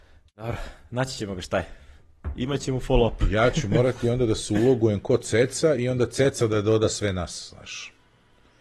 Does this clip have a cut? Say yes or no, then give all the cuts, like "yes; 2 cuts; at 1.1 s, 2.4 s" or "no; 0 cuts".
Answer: no; 0 cuts